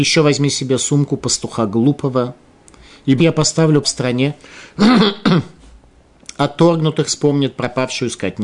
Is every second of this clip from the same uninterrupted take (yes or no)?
no